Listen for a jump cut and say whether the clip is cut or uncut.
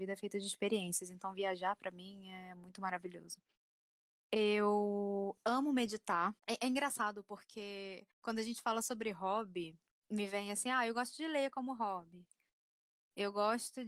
cut